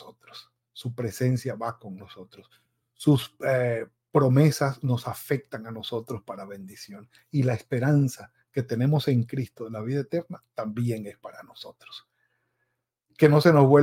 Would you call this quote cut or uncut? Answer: uncut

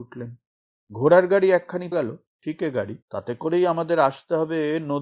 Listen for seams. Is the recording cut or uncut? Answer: cut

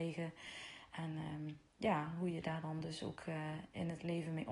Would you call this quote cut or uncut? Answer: uncut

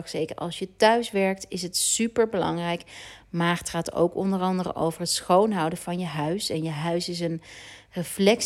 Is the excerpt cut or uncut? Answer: uncut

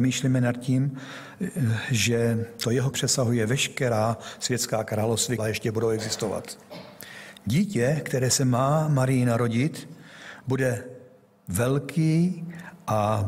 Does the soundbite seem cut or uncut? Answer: cut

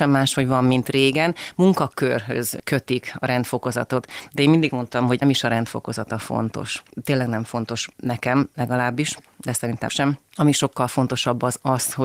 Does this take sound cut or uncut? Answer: cut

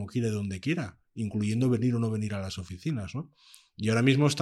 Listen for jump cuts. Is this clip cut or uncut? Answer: uncut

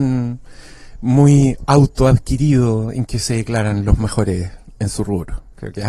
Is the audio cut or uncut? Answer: uncut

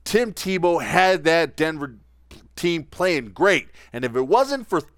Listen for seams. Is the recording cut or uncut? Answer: uncut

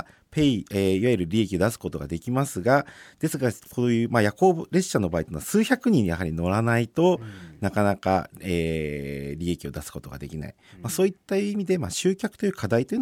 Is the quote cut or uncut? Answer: uncut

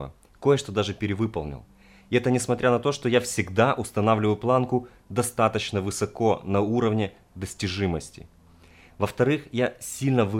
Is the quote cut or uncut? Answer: uncut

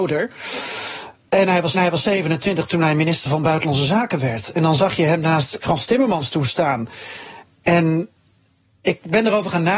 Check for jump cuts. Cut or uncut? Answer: cut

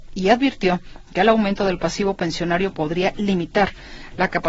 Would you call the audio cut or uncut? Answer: uncut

